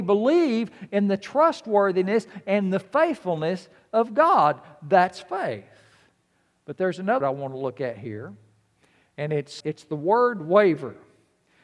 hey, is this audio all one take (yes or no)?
no